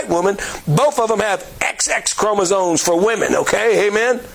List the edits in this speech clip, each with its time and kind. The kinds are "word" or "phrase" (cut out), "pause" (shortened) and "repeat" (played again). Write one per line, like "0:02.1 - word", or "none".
none